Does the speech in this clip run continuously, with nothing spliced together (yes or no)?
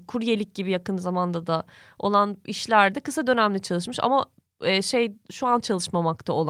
yes